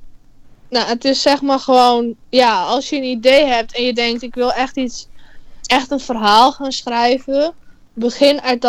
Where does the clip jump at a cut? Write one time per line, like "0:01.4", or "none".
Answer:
0:02.2